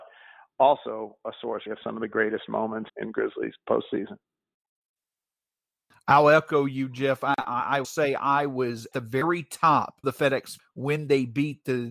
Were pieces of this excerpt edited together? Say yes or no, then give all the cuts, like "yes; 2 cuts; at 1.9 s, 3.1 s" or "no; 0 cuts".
yes; 6 cuts; at 1.7 s, 2.9 s, 7.8 s, 8.9 s, 10.0 s, 10.6 s